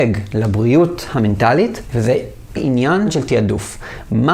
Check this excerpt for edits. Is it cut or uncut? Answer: cut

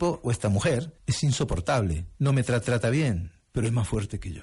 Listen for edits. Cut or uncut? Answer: cut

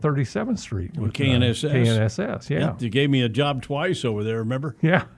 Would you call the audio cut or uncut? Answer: uncut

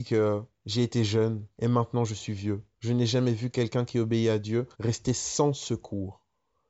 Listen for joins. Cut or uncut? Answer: cut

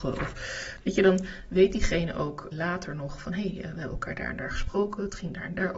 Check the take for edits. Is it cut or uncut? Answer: cut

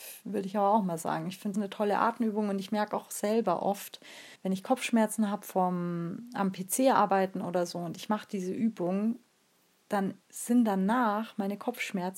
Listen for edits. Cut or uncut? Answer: cut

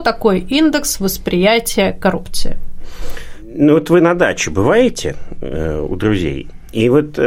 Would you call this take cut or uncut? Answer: uncut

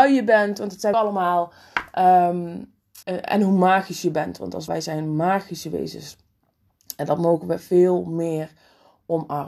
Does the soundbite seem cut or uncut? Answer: cut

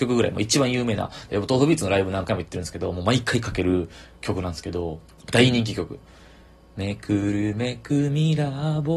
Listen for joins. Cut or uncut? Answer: uncut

